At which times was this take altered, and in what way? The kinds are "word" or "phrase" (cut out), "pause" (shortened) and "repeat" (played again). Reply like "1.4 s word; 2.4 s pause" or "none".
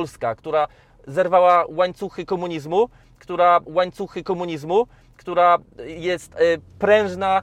3.7 s repeat